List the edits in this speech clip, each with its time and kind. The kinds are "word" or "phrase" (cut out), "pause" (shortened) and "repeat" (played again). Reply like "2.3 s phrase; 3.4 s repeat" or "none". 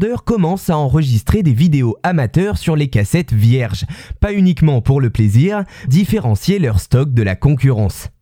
5.9 s phrase